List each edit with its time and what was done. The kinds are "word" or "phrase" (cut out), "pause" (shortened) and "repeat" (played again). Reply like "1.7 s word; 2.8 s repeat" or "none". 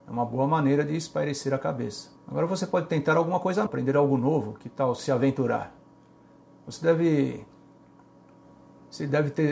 2.2 s pause; 3.7 s word